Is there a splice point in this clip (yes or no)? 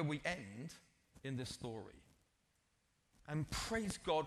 no